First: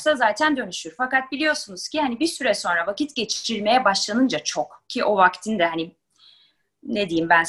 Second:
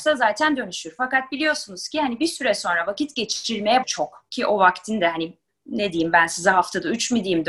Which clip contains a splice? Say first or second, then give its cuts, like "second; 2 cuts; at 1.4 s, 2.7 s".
second; 2 cuts; at 3.8 s, 5.5 s